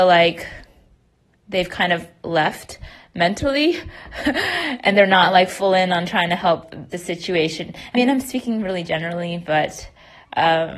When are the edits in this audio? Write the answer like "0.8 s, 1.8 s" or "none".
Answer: 6.9 s, 7.9 s